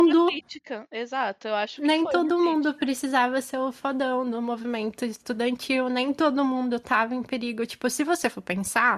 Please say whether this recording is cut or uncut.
uncut